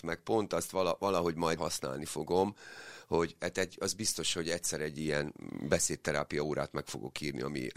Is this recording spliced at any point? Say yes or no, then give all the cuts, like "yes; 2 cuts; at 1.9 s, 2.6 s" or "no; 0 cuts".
yes; 1 cut; at 1.6 s